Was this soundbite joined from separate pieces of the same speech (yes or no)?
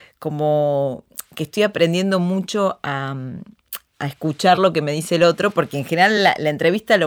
no